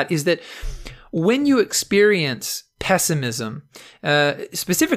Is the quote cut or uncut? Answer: uncut